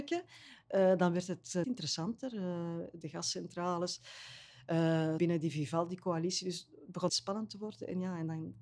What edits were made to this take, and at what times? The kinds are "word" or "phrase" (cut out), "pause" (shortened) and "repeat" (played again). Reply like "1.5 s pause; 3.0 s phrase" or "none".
1.6 s word; 3.0 s phrase; 5.2 s word; 7.1 s word

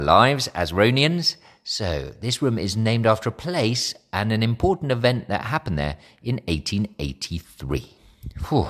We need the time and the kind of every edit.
none

